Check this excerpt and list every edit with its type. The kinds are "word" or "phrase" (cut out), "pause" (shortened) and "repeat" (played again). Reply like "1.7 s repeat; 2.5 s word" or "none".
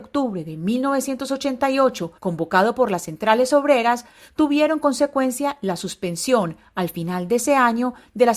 2.2 s pause; 4.8 s word